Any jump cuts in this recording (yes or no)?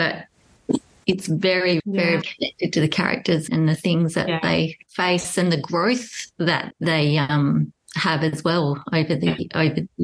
yes